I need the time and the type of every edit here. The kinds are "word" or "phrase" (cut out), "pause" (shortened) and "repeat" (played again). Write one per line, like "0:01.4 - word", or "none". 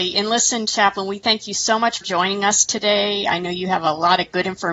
0:02.0 - word